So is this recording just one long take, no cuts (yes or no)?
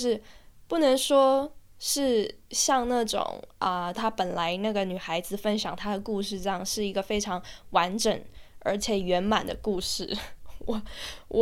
no